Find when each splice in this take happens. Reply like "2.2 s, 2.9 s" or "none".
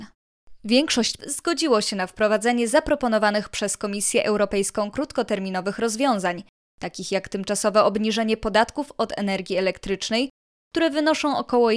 1.2 s